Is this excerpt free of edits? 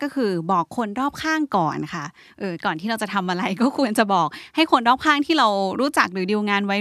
yes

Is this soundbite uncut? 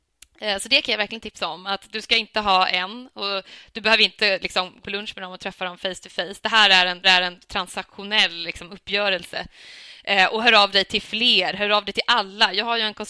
no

